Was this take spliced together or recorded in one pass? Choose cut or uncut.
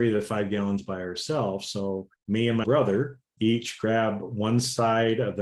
cut